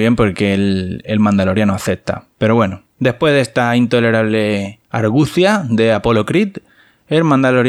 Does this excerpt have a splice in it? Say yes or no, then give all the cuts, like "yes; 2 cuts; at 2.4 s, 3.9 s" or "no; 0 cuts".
yes; 2 cuts; at 2.9 s, 4.8 s